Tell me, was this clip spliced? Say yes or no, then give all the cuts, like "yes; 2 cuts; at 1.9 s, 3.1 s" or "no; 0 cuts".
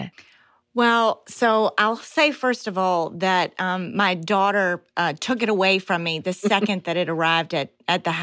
no; 0 cuts